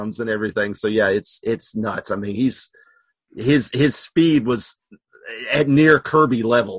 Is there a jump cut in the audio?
no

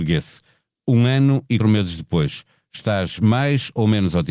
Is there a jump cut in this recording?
yes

